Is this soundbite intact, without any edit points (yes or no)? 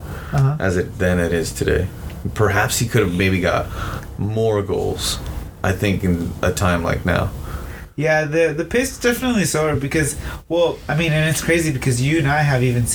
yes